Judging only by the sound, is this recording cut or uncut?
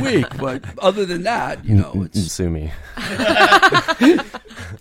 cut